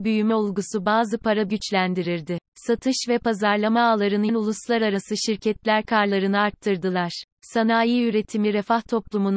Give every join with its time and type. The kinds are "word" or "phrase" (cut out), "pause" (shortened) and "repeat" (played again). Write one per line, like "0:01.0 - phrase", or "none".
0:01.5 - phrase
0:02.5 - pause
0:04.3 - word
0:07.3 - pause